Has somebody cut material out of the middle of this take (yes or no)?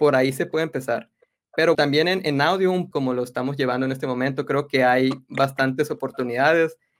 yes